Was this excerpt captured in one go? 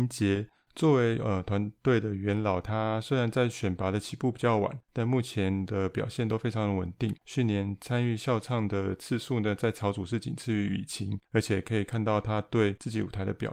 no; 3 cuts; at 4.8 s, 7.2 s, 11.3 s

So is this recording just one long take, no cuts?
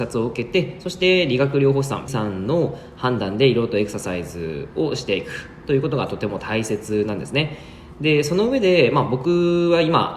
no; 1 cut; at 2.1 s

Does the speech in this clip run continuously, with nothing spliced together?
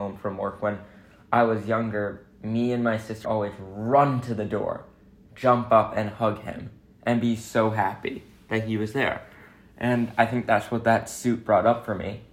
no; 1 cut; at 3.2 s

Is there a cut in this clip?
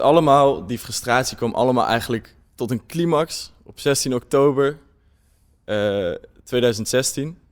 no; 0 cuts

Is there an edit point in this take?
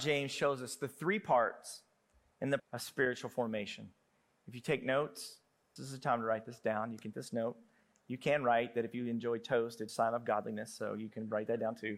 yes; 4 cuts; at 2.6 s, 5.8 s, 7.1 s, 9.9 s

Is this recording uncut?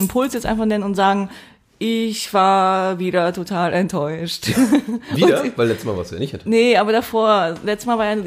yes; 0 cuts

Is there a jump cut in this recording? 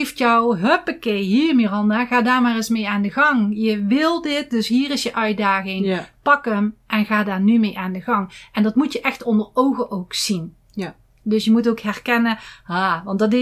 no; 0 cuts

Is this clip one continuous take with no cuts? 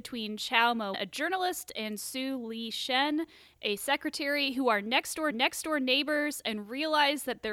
no; 2 cuts; at 0.9 s, 5.3 s

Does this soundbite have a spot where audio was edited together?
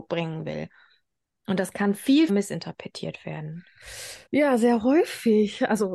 yes; 2 cuts; at 2.3 s, 4.3 s

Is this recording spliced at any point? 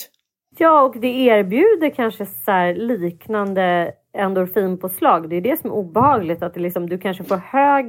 no; 0 cuts

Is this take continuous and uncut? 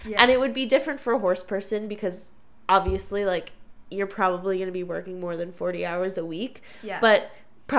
yes; 0 cuts

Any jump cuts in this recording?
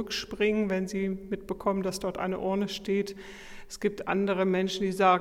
no; 0 cuts

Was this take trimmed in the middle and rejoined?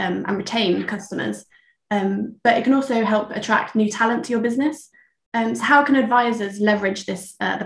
no; 0 cuts

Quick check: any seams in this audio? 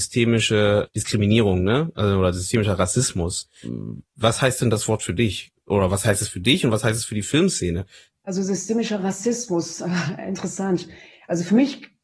no; 0 cuts

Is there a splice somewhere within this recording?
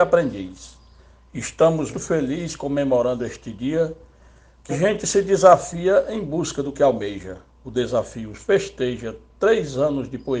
yes; 2 cuts; at 1.9 s, 4.7 s

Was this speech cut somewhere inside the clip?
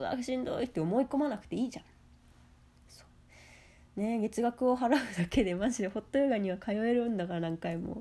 no; 0 cuts

